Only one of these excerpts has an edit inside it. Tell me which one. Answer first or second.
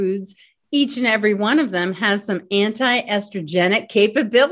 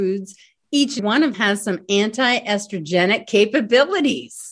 second